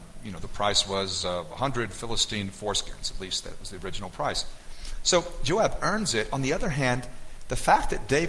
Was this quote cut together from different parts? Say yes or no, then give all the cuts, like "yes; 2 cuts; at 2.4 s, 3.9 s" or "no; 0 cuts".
no; 0 cuts